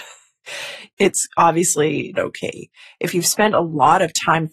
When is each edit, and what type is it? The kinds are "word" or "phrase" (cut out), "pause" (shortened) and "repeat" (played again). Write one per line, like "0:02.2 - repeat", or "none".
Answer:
0:02.2 - word